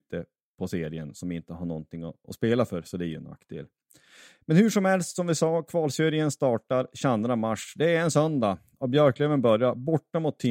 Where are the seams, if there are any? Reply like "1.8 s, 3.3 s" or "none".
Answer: none